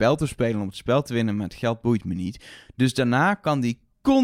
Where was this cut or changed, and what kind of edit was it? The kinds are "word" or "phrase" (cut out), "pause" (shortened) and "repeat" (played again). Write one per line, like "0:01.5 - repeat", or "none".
none